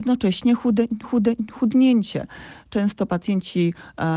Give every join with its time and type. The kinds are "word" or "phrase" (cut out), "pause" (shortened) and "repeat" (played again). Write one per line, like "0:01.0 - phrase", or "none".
0:01.0 - repeat